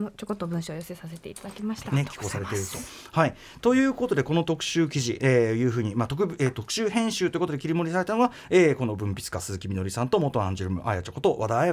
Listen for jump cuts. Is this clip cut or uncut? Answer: uncut